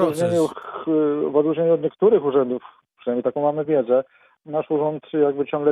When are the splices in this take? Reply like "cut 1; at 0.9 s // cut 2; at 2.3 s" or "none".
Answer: none

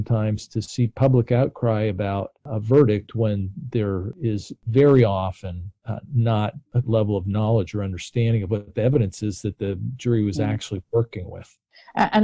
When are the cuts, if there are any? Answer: cut 1; at 6.8 s

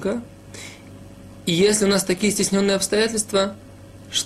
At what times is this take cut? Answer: none

